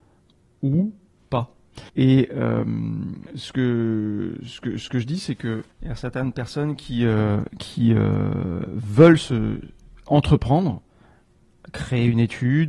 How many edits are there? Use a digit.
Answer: 3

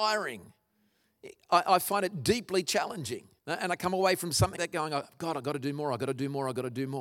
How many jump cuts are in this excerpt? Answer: 2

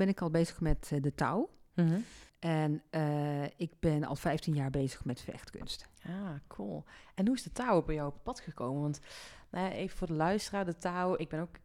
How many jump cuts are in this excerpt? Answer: 1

